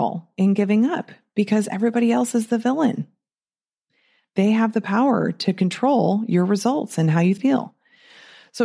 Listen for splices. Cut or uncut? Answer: cut